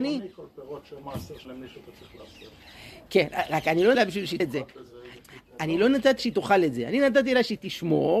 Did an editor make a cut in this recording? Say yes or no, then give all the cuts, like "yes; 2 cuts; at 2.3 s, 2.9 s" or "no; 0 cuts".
yes; 5 cuts; at 1.0 s, 1.4 s, 3.9 s, 4.4 s, 6.2 s